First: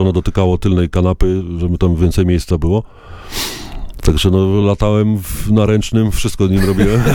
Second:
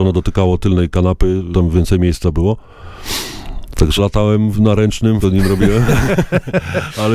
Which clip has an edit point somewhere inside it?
second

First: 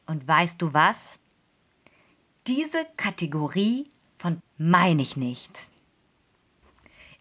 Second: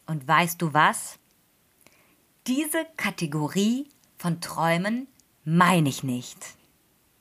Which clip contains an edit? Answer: first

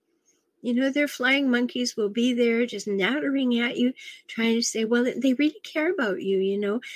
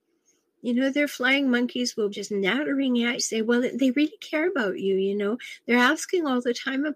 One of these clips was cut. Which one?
second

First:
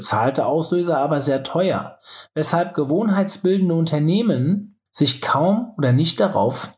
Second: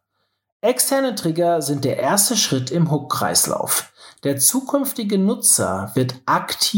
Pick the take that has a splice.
first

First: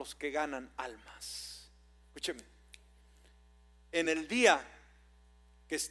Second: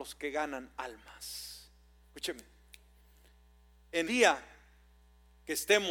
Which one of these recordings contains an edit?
second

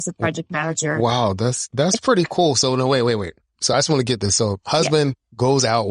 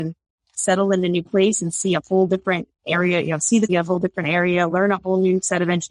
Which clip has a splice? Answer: second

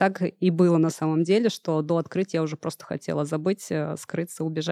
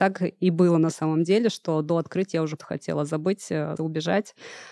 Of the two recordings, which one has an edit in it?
second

